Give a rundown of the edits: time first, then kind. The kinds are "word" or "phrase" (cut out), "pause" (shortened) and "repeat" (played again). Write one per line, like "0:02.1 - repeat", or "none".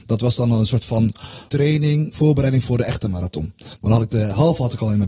0:01.5 - word
0:02.1 - word